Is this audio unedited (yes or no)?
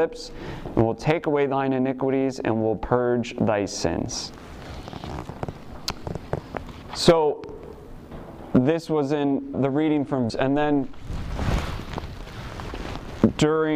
no